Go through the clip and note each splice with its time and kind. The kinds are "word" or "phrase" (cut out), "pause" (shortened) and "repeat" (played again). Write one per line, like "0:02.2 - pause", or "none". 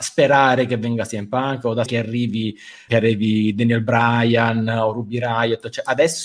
0:01.9 - word
0:02.9 - word